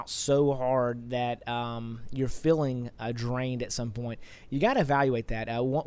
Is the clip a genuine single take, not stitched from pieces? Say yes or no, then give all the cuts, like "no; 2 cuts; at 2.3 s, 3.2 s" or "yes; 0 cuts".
yes; 0 cuts